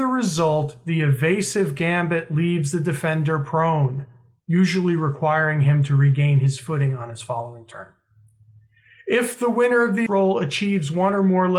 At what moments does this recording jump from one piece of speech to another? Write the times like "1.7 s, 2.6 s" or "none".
10.1 s